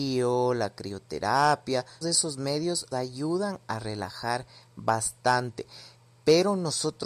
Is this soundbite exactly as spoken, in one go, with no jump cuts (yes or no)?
no